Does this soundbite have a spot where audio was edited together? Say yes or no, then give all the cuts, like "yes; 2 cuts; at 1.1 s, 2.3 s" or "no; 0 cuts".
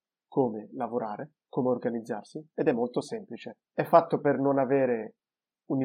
yes; 2 cuts; at 1.4 s, 3.7 s